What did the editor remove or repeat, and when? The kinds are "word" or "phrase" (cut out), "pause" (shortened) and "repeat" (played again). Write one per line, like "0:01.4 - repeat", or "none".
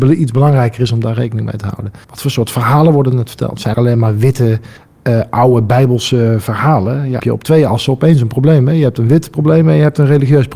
0:02.0 - pause
0:03.7 - phrase
0:04.8 - pause
0:07.2 - phrase